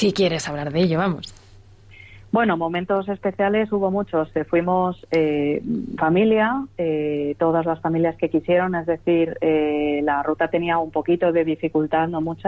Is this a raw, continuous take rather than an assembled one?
no; 1 cut; at 6.0 s

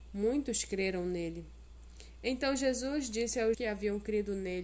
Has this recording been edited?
yes; 1 cut; at 3.5 s

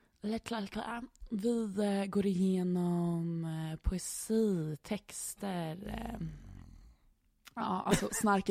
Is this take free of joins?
yes; 0 cuts

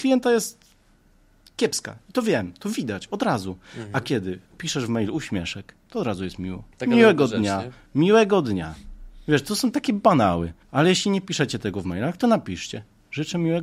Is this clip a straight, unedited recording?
no; 4 cuts; at 4.5 s, 5.8 s, 6.7 s, 10.6 s

